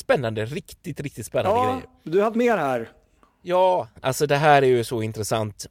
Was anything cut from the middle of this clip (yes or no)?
yes